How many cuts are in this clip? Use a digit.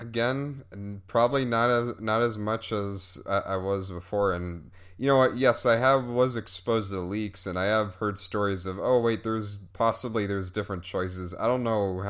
1